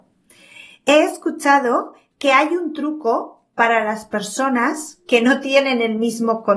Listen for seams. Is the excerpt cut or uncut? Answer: uncut